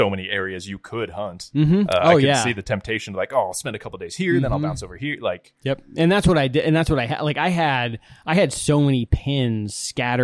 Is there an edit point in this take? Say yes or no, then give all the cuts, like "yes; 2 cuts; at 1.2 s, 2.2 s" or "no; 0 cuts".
no; 0 cuts